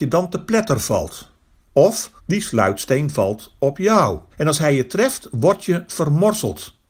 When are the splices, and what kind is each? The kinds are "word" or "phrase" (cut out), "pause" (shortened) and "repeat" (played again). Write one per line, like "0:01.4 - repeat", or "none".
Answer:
0:02.2 - pause
0:04.3 - pause